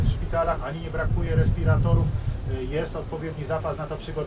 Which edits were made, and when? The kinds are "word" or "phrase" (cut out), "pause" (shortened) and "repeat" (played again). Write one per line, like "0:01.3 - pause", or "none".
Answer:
none